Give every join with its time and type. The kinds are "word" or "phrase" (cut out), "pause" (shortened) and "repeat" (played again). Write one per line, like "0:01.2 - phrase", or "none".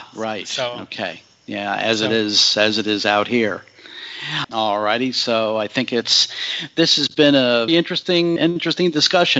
0:07.7 - word
0:08.4 - word